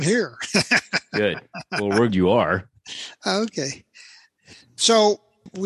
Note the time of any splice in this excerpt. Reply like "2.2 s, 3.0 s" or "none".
2.1 s